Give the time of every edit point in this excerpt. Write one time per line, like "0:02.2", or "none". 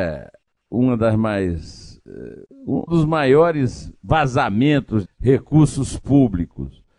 0:02.9
0:05.1